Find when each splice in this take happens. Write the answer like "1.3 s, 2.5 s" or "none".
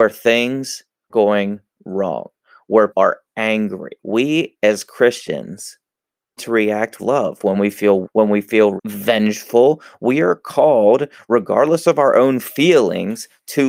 1.1 s, 2.9 s, 4.0 s, 6.4 s, 7.0 s, 7.5 s, 8.0 s, 8.8 s